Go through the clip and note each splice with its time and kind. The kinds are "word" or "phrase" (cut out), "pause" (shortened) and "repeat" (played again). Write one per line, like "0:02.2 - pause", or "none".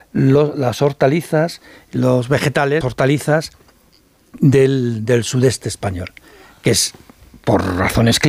0:02.8 - word